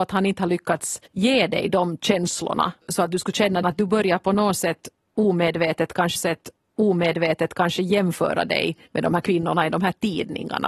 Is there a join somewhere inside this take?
yes; 5 cuts; at 1.1 s, 2.8 s, 3.6 s, 6.2 s, 8.9 s

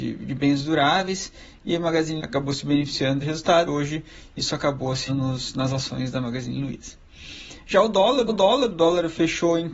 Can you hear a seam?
yes; 5 cuts; at 2.2 s, 3.2 s, 3.7 s, 5.1 s, 8.3 s

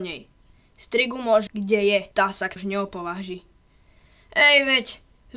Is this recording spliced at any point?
yes; 3 cuts; at 1.5 s, 2.1 s, 2.6 s

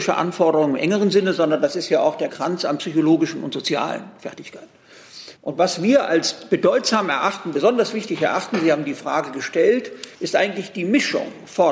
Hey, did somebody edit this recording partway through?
yes; 3 cuts; at 2.3 s, 5.4 s, 10.1 s

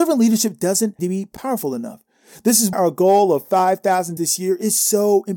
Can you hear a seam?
yes; 3 cuts; at 1.0 s, 2.7 s, 4.2 s

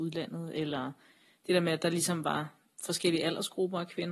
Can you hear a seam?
no; 0 cuts

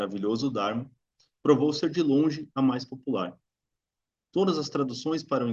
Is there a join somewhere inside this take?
no; 0 cuts

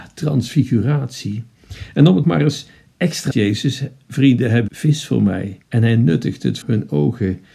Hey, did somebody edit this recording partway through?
yes; 5 cuts; at 2.2 s, 3.3 s, 4.7 s, 5.6 s, 6.6 s

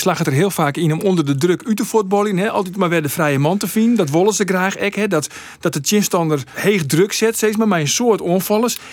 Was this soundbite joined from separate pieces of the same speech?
no; 0 cuts

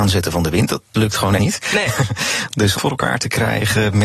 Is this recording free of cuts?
no; 3 cuts; at 0.9 s, 1.4 s, 2.8 s

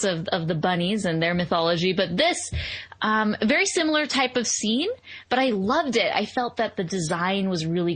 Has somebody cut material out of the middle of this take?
no; 0 cuts

